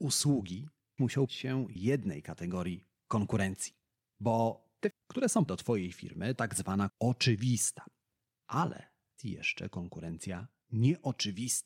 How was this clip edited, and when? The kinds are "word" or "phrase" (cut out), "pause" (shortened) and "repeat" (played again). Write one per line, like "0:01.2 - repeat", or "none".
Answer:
0:01.0 - word
0:01.3 - word
0:01.8 - word
0:04.9 - word
0:05.5 - word
0:06.4 - word
0:06.9 - word
0:09.2 - word